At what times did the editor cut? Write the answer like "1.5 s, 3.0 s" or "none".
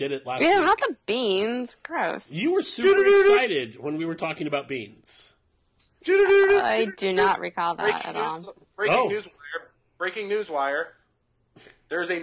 none